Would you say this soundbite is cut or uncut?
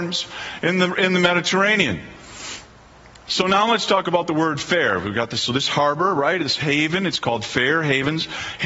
uncut